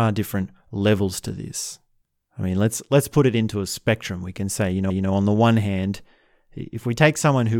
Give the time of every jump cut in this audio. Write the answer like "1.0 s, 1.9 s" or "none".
2.0 s, 4.9 s